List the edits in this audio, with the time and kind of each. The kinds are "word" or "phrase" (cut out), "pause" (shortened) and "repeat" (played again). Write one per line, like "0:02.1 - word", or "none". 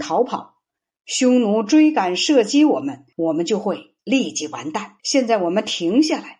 0:03.1 - pause
0:04.0 - pause
0:05.0 - pause